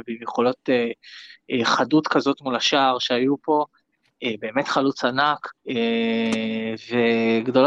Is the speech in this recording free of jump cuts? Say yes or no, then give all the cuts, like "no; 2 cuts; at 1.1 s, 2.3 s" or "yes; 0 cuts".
no; 1 cut; at 5.6 s